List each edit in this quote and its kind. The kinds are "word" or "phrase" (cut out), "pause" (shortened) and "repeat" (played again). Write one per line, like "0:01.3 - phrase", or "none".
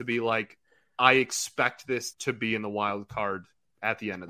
0:02.1 - word